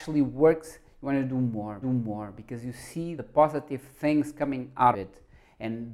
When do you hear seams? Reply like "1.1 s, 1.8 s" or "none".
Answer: 1.8 s, 3.2 s, 4.9 s